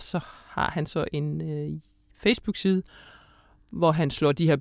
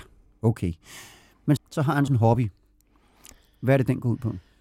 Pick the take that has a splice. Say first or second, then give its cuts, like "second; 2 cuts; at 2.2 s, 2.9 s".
second; 2 cuts; at 1.6 s, 2.1 s